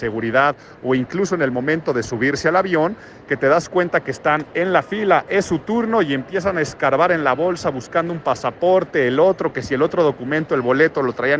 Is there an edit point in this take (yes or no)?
no